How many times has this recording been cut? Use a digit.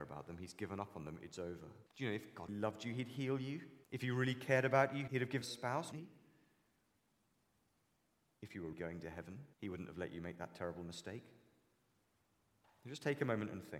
8